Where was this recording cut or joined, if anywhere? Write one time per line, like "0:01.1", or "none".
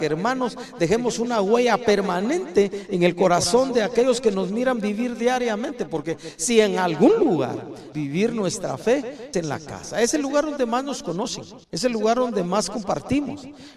0:07.9
0:09.3
0:11.6